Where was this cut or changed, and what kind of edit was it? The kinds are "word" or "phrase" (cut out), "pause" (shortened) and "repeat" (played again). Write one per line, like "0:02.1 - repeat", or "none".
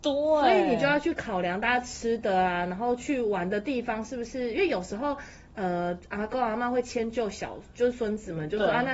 none